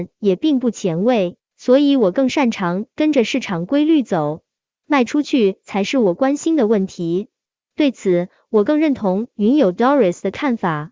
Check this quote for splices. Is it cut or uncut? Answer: uncut